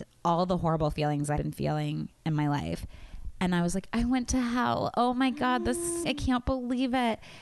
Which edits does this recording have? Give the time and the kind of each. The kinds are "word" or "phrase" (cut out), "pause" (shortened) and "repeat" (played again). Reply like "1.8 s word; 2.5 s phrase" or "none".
1.4 s word; 6.0 s word

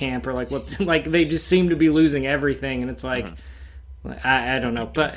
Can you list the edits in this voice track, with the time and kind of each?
none

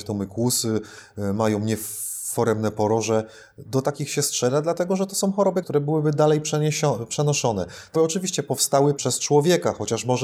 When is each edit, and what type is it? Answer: 5.6 s word; 7.9 s word; 9.0 s word

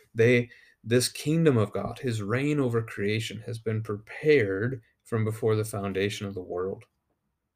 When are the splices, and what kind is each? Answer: none

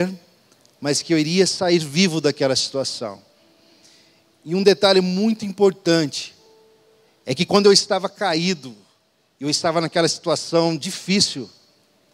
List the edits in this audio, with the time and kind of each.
none

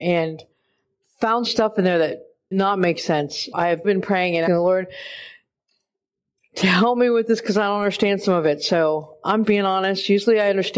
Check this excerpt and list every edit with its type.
1.4 s word; 2.5 s word; 3.5 s word; 3.8 s word; 4.5 s word; 9.4 s word

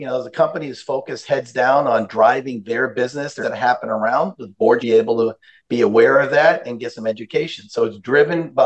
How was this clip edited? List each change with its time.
3.4 s phrase; 4.8 s word

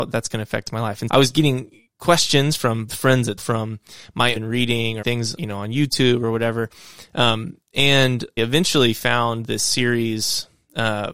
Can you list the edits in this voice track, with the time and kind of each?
1.1 s word; 2.9 s word; 3.4 s word; 4.4 s phrase; 5.0 s word; 5.4 s word; 8.4 s word

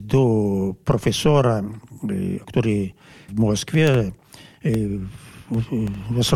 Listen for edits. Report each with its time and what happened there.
2.4 s word; 3.3 s word

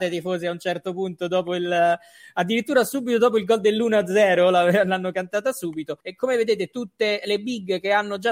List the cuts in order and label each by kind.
6.0 s pause

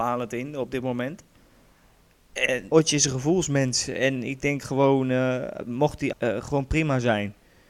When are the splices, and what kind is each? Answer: 2.7 s word; 6.1 s word

